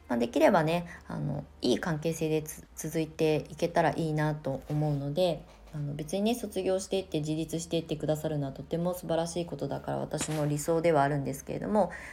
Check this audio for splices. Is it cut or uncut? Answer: cut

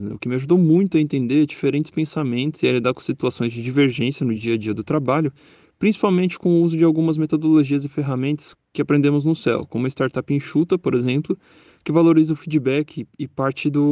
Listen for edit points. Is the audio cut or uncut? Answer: uncut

